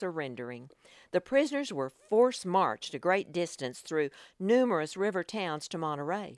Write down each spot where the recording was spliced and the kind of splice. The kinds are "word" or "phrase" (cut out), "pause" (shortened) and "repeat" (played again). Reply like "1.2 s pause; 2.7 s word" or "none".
none